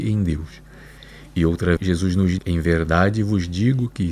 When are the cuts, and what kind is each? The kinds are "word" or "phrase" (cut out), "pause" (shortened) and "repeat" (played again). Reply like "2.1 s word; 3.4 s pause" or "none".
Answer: 1.8 s word; 2.4 s word